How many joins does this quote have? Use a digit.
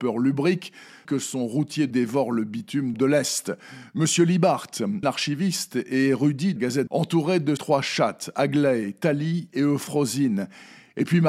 7